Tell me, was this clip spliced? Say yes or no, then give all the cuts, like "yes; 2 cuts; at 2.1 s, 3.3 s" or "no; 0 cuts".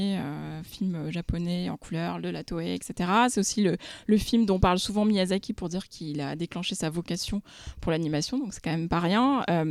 no; 0 cuts